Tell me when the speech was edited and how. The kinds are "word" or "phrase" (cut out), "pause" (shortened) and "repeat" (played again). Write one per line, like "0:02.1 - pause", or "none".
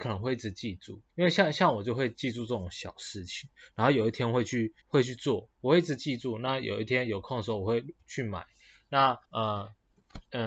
0:01.1 - pause
0:04.8 - pause
0:08.0 - pause
0:09.2 - pause

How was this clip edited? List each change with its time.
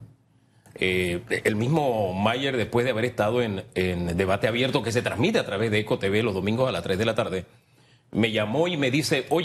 none

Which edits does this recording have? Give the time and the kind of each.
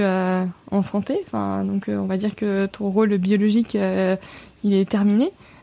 none

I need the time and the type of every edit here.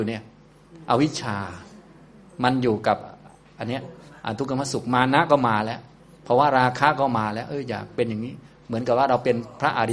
none

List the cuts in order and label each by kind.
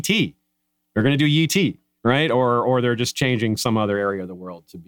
none

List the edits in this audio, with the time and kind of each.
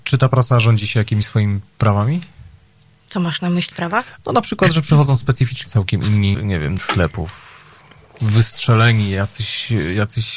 0:03.7 - word
0:05.7 - word
0:06.3 - word
0:06.8 - word

